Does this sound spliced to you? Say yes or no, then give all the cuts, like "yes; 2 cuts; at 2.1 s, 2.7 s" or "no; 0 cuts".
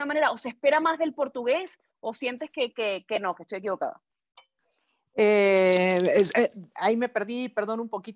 no; 0 cuts